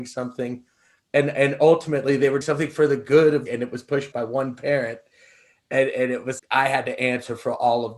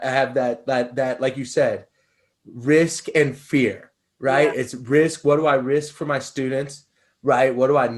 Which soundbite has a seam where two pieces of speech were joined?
first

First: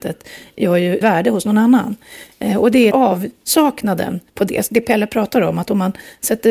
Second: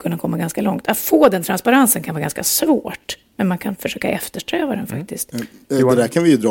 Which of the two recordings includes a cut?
first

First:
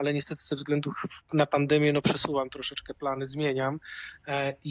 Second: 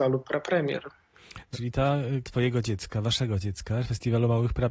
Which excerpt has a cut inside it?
second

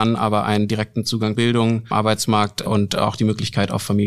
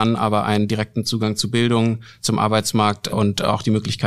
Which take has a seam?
first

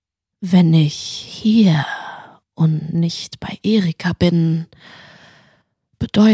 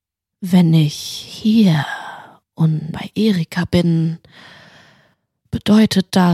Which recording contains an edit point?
second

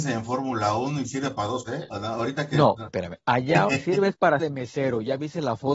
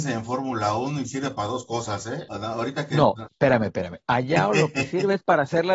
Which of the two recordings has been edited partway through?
first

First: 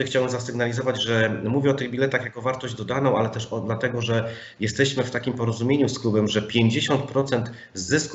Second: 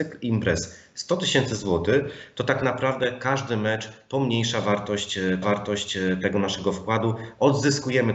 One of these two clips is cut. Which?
second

